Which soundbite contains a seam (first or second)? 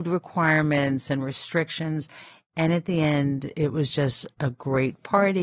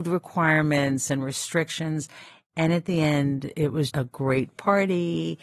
second